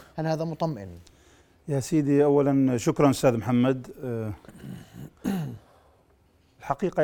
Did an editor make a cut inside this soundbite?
no; 0 cuts

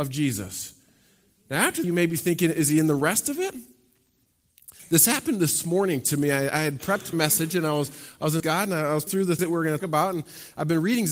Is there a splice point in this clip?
yes; 6 cuts; at 1.8 s, 7.1 s, 8.4 s, 9.1 s, 9.4 s, 9.8 s

